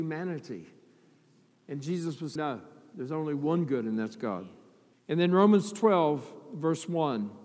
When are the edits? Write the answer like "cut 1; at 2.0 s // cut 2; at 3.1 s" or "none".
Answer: cut 1; at 2.4 s // cut 2; at 4.9 s